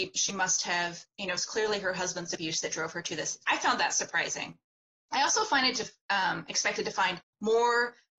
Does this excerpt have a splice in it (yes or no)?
no